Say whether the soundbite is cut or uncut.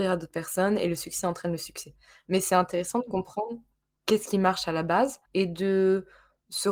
cut